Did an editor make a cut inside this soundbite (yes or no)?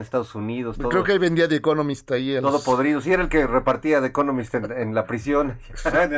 no